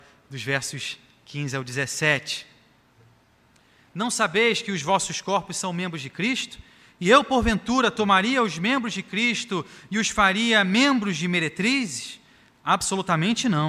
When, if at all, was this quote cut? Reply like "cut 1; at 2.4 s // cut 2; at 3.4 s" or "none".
none

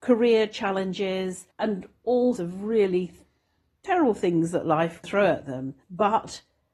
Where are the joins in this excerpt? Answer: cut 1; at 1.5 s // cut 2; at 2.4 s // cut 3; at 5.0 s // cut 4; at 5.8 s

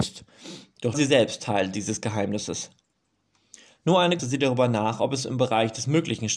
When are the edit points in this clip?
cut 1; at 0.9 s // cut 2; at 4.2 s

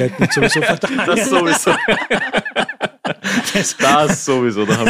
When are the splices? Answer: none

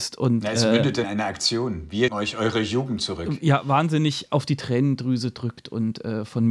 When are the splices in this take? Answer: cut 1; at 1.0 s // cut 2; at 2.1 s

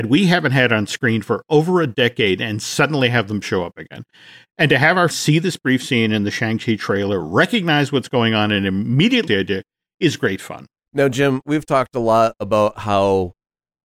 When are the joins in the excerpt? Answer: cut 1; at 5.1 s // cut 2; at 9.3 s // cut 3; at 11.4 s

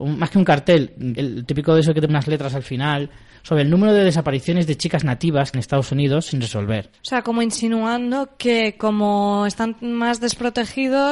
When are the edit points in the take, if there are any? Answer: cut 1; at 1.2 s // cut 2; at 2.1 s // cut 3; at 5.5 s // cut 4; at 7.0 s

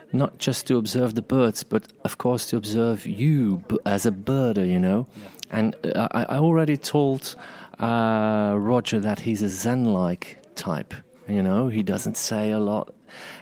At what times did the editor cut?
none

